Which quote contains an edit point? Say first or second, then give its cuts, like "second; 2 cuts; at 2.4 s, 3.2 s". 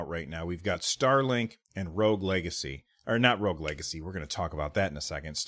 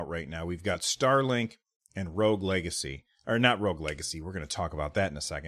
first; 1 cut; at 1.6 s